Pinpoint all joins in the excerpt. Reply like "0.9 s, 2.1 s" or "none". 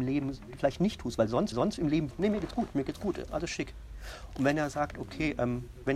1.5 s, 2.1 s, 2.7 s, 3.3 s